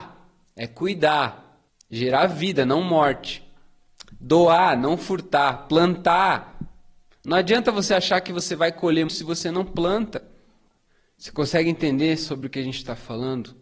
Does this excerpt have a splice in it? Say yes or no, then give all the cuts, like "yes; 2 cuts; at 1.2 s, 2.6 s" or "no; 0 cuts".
yes; 2 cuts; at 1.7 s, 9.1 s